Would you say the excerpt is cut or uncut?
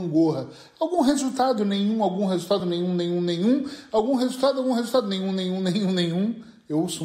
uncut